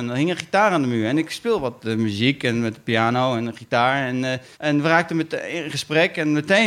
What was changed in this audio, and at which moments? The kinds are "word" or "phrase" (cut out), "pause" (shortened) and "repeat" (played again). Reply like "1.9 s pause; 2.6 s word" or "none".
4.5 s pause